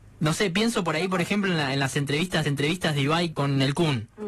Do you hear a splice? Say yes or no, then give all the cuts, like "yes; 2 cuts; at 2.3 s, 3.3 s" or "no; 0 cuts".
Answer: yes; 2 cuts; at 2.4 s, 3.3 s